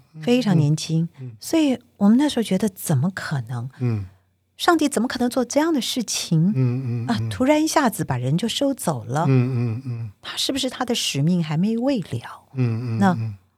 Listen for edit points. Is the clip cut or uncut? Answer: uncut